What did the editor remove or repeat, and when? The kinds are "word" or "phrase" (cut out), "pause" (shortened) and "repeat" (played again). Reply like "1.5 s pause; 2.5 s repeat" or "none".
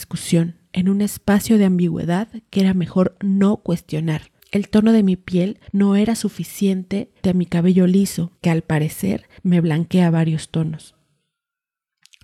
4.4 s pause; 5.7 s pause; 7.2 s word; 8.4 s pause; 9.4 s pause